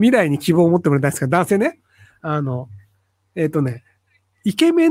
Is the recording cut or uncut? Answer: uncut